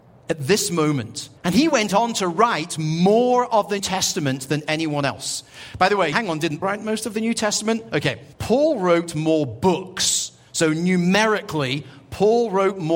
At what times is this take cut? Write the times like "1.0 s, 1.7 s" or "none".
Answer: 1.4 s, 3.8 s, 6.1 s, 6.6 s, 8.3 s